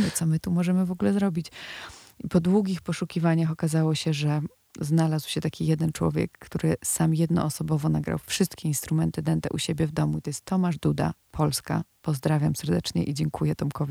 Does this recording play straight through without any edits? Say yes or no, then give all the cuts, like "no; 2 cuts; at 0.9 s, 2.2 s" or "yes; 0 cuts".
yes; 0 cuts